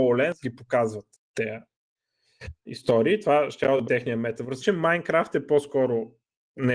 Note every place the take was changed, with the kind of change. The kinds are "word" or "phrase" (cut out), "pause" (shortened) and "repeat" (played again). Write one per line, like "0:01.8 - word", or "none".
0:02.7 - word
0:03.8 - word
0:04.6 - word